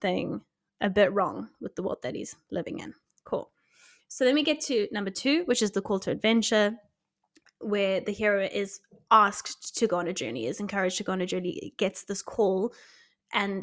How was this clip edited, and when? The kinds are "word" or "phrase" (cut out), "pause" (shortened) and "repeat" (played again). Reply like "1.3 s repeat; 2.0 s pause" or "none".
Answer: none